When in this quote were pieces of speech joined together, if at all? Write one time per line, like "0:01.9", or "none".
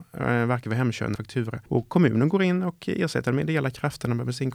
0:01.2
0:01.7